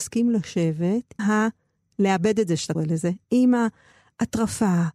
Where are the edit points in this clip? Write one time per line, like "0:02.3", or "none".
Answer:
0:01.2
0:02.7